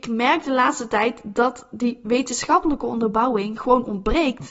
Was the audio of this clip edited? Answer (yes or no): no